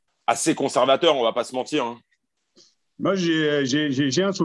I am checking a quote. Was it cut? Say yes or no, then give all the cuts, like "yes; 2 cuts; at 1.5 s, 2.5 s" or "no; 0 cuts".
no; 0 cuts